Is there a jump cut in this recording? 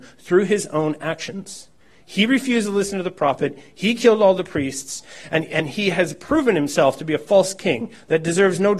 yes; 1 cut; at 1.8 s

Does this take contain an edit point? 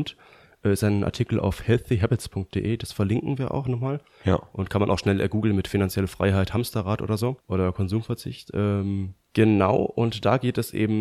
yes; 2 cuts; at 7.4 s, 9.2 s

